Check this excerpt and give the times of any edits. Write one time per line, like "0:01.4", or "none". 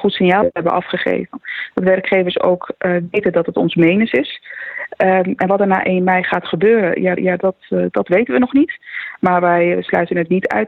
0:07.2